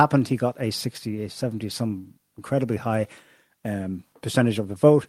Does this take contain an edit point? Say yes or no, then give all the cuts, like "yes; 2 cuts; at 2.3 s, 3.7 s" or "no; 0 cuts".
no; 0 cuts